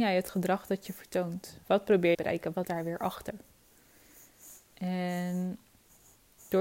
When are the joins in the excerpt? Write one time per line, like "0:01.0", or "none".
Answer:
0:01.6
0:02.1
0:02.6
0:04.6

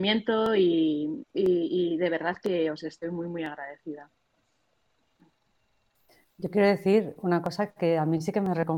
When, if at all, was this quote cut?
none

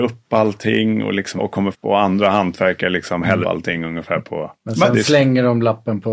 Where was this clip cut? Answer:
0:01.4
0:01.7
0:03.4

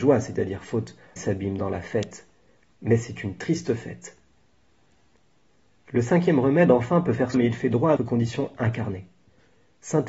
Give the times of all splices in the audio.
0:01.2
0:07.3
0:08.0

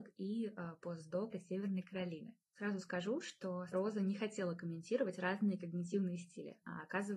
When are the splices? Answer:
0:01.3
0:02.4
0:03.7

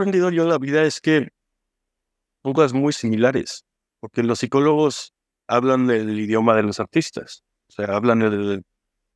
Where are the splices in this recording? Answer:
none

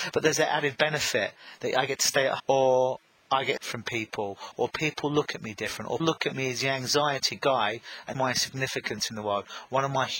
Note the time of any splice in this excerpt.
0:02.4
0:03.6
0:06.0
0:08.1

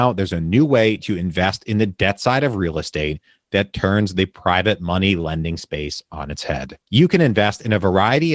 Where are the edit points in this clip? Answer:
none

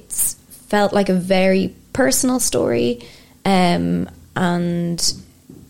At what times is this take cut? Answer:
none

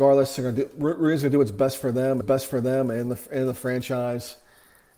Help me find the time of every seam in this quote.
0:02.2

